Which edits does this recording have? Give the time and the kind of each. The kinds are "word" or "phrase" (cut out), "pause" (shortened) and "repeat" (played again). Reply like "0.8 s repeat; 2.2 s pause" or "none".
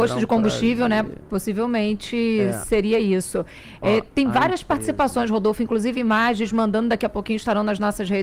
none